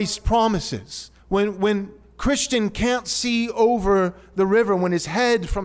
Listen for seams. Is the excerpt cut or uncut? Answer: cut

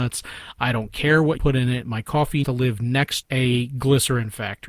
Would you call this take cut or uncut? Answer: cut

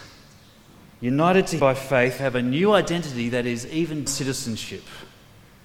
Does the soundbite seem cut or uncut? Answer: cut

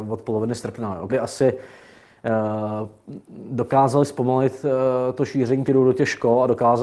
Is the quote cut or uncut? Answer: cut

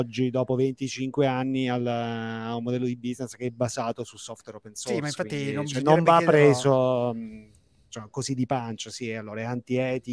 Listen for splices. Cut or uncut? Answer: uncut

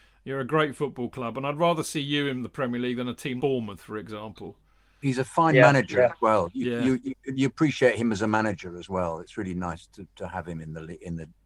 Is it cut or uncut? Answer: cut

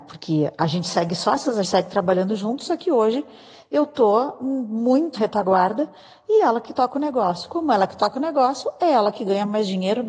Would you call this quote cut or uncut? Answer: cut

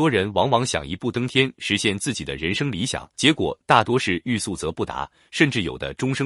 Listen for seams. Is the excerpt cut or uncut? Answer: cut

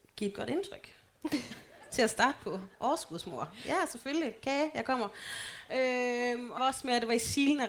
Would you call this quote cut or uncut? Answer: cut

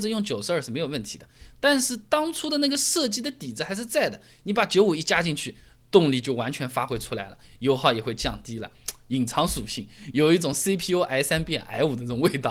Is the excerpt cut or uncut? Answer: uncut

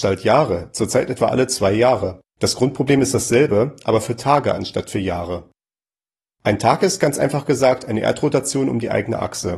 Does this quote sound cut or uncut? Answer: cut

